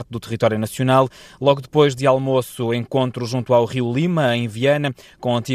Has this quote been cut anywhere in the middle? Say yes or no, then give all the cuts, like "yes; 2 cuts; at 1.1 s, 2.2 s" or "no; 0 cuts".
no; 0 cuts